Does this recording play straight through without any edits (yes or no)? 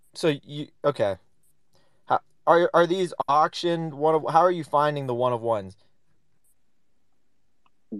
yes